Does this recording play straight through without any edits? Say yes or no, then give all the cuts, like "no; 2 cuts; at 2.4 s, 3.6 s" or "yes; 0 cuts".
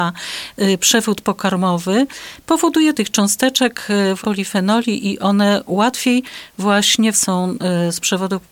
no; 3 cuts; at 2.9 s, 4.2 s, 7.1 s